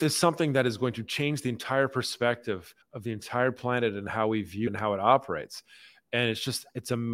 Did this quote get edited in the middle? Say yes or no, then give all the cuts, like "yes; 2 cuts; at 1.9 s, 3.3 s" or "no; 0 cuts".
yes; 2 cuts; at 2.8 s, 4.7 s